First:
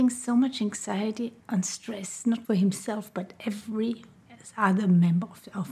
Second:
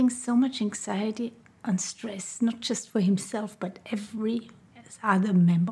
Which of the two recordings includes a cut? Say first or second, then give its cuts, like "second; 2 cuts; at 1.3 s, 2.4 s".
first; 2 cuts; at 1.4 s, 2.4 s